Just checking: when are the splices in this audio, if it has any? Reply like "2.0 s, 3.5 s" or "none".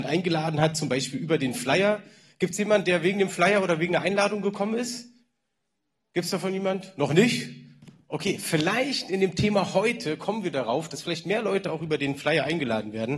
none